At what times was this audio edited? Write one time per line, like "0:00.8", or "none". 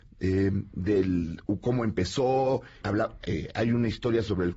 0:02.8